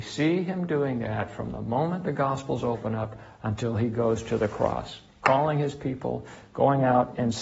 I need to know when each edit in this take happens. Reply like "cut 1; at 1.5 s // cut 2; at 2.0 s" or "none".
none